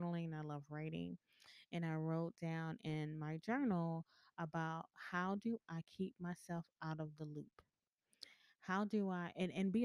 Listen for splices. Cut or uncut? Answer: uncut